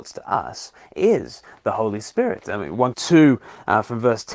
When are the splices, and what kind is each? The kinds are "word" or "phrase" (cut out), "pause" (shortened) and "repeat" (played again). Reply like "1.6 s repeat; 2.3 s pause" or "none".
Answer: 2.9 s word